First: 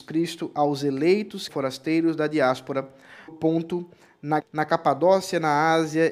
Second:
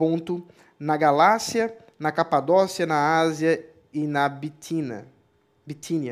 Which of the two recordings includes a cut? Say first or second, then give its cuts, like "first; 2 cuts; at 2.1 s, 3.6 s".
first; 3 cuts; at 1.5 s, 3.3 s, 4.4 s